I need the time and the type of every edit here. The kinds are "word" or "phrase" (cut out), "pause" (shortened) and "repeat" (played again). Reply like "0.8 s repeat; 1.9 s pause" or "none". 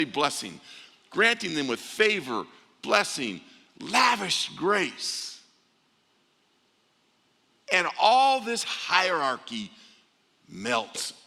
none